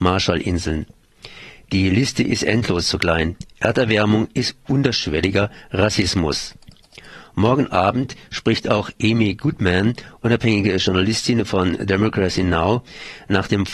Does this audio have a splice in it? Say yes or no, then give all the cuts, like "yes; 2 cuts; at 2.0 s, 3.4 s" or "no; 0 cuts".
no; 0 cuts